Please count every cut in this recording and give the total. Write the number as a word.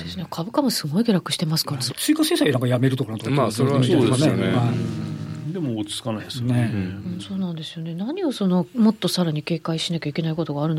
two